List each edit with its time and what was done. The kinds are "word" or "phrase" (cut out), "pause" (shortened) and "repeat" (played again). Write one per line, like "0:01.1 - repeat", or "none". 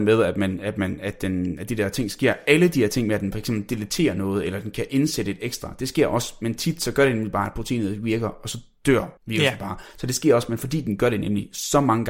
0:09.2 - pause

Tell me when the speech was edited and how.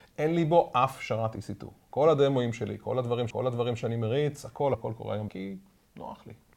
0:03.3 - repeat
0:04.7 - word
0:05.3 - word

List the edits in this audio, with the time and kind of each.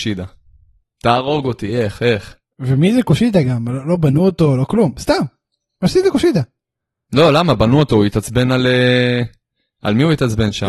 none

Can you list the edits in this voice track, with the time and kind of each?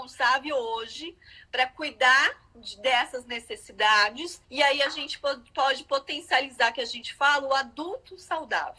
0:04.4 - pause

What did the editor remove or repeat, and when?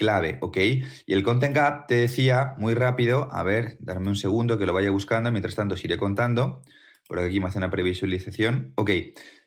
none

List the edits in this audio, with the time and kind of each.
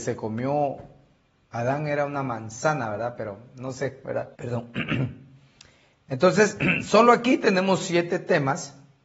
0:04.3 - pause

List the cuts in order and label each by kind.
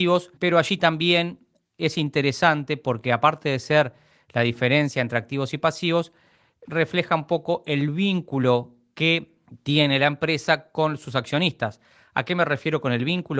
none

